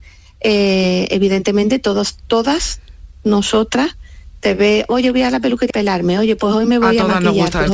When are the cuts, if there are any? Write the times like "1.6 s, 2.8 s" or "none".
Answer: 4.4 s, 5.7 s